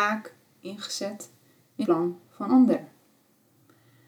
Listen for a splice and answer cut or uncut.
cut